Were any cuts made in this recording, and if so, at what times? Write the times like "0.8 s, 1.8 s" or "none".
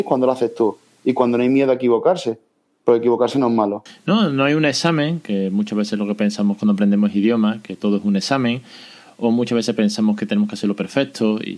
none

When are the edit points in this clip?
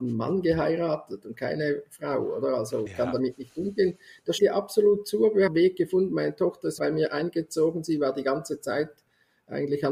2.9 s, 4.4 s, 5.5 s, 6.8 s

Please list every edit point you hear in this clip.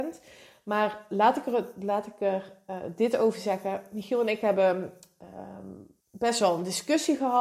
6.0 s

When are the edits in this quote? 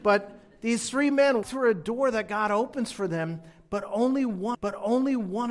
1.4 s, 4.5 s

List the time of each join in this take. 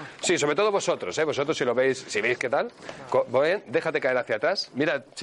none

